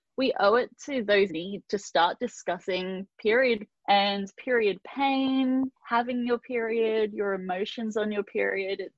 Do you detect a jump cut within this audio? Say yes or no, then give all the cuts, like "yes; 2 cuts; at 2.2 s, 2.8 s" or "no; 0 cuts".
yes; 3 cuts; at 1.3 s, 3.7 s, 5.8 s